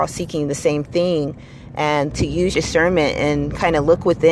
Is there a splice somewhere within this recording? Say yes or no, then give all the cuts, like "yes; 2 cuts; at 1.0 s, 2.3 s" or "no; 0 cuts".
yes; 2 cuts; at 2.1 s, 2.5 s